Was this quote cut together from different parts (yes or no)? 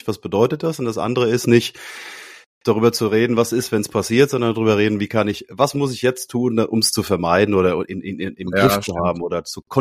no